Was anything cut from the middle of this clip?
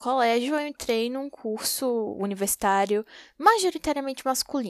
no; 0 cuts

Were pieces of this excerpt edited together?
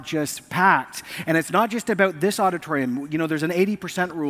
no; 0 cuts

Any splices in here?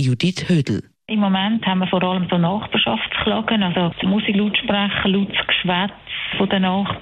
yes; 1 cut; at 4.0 s

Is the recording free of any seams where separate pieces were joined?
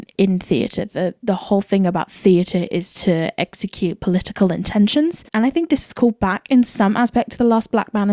no; 1 cut; at 5.3 s

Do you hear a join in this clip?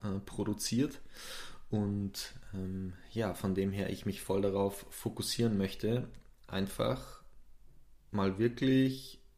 no; 0 cuts

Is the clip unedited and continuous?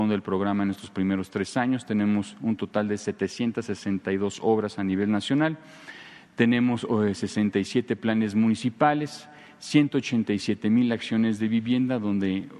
yes; 0 cuts

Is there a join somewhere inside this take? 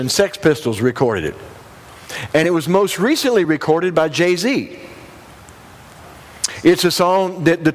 no; 0 cuts

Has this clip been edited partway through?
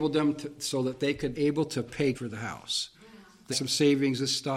yes; 4 cuts; at 1.3 s, 2.1 s, 2.9 s, 3.5 s

